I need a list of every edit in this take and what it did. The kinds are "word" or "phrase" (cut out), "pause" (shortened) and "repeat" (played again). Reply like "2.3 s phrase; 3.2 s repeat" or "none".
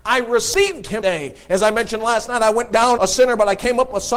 1.0 s word; 3.0 s word